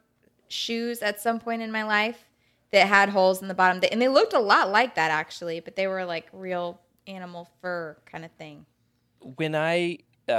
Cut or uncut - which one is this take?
uncut